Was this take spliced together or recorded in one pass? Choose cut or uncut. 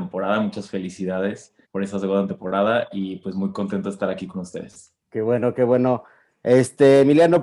cut